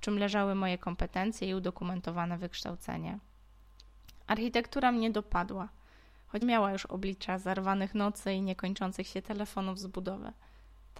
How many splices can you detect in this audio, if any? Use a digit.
1